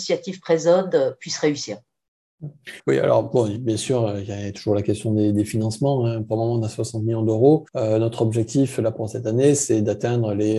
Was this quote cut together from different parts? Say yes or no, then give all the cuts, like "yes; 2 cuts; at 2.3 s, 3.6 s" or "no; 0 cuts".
yes; 2 cuts; at 2.8 s, 7.7 s